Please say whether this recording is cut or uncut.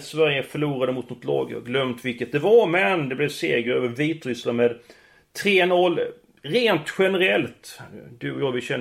uncut